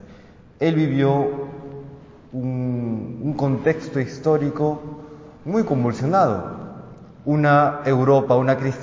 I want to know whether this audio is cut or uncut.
uncut